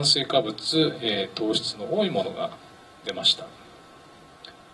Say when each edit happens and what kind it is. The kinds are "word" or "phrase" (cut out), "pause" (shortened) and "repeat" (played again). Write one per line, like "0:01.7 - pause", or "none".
none